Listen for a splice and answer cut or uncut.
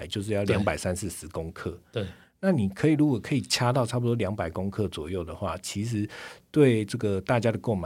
uncut